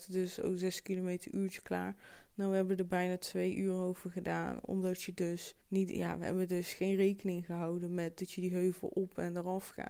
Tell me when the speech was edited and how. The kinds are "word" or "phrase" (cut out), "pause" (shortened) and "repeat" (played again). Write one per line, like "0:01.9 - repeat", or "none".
0:05.6 - pause